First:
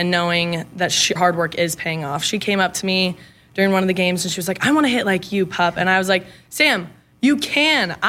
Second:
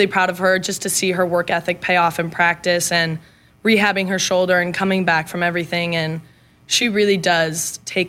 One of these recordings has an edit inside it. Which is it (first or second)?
first